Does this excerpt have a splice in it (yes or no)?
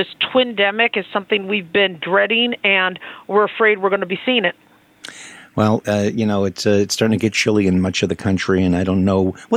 no